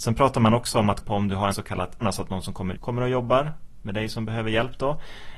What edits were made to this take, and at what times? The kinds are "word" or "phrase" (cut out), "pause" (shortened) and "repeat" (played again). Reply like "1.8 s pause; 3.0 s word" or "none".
1.0 s phrase; 1.5 s phrase; 2.0 s word; 2.8 s word